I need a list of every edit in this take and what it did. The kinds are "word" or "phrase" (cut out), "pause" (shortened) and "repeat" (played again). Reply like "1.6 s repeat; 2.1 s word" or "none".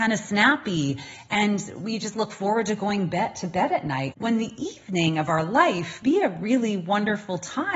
4.1 s word; 6.0 s word